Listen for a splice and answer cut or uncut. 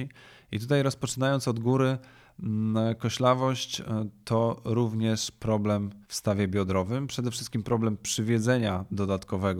cut